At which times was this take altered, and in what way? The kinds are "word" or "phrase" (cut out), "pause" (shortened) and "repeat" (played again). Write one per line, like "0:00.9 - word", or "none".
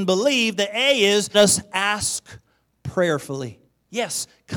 0:01.3 - word
0:03.7 - pause